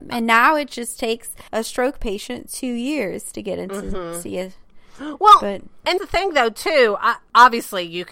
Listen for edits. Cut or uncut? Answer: cut